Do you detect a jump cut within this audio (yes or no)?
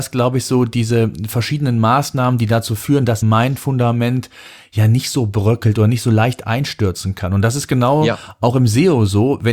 yes